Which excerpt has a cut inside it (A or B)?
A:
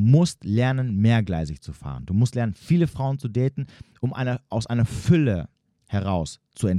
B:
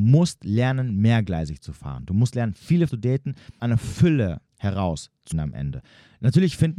B